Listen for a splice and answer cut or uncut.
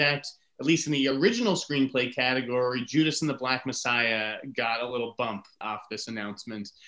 uncut